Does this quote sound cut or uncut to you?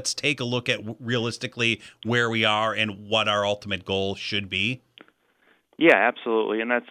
uncut